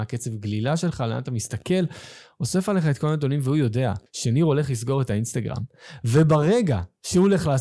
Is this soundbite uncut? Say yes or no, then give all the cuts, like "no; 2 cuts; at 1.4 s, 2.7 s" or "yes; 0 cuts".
no; 1 cut; at 4.1 s